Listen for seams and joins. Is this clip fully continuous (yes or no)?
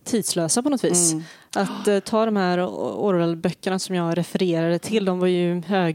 yes